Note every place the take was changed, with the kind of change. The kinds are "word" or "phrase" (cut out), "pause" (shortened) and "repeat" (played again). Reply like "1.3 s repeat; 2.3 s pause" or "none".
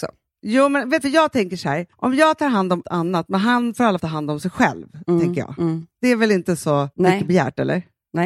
1.0 s phrase; 1.9 s pause; 2.8 s word; 4.0 s word; 6.9 s pause